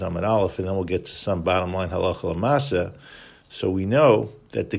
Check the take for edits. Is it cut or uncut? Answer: uncut